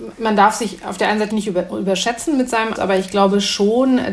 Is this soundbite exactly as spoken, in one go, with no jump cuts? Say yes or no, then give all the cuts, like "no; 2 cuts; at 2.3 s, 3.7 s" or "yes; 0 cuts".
no; 2 cuts; at 1.3 s, 2.7 s